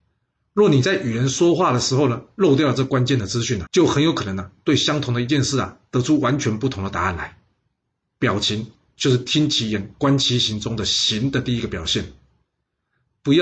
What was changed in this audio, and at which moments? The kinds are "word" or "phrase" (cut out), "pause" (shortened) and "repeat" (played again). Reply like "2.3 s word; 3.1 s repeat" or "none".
3.7 s word